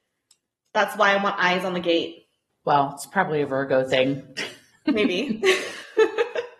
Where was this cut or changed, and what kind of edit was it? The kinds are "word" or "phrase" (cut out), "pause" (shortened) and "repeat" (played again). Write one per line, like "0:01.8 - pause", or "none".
none